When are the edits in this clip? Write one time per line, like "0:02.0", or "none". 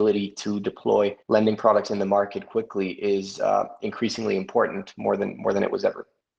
0:01.2